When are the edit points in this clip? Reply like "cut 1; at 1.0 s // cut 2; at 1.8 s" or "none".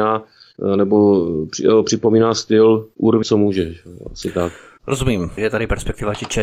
cut 1; at 3.2 s // cut 2; at 5.4 s